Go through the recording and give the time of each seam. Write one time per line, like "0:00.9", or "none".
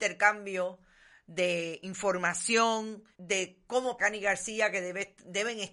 0:03.1
0:04.0